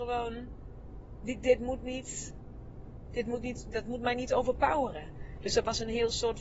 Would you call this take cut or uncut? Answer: uncut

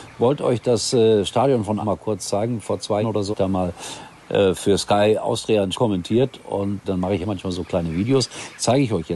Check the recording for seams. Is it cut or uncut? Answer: cut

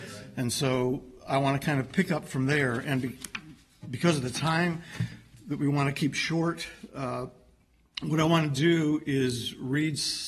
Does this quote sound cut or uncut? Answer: uncut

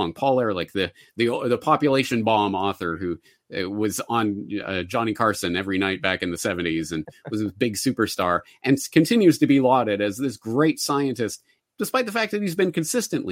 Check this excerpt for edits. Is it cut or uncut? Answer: uncut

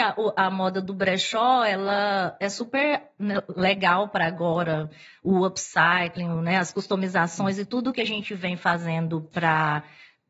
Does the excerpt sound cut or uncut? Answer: uncut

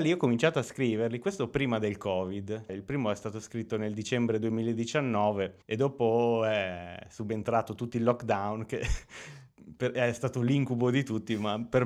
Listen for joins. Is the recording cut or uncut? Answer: cut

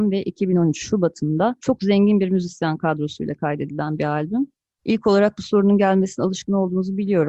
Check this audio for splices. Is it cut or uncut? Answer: uncut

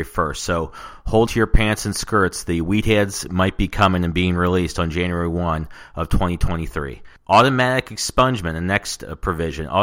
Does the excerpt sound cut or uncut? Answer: cut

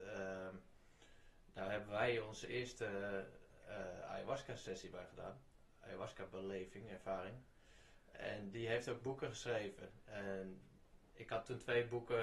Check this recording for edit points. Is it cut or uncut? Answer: uncut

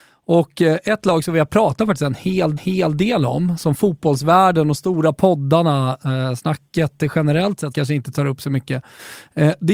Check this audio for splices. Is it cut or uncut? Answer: cut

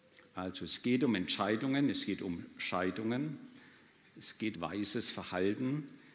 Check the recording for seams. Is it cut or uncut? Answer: cut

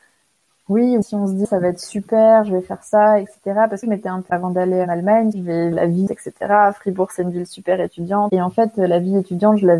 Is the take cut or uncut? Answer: cut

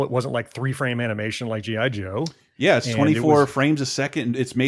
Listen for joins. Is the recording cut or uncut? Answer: uncut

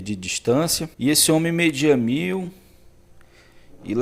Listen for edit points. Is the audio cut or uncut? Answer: cut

